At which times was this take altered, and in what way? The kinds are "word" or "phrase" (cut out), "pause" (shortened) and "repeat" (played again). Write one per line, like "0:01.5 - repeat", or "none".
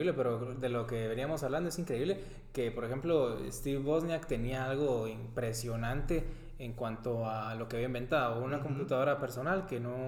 none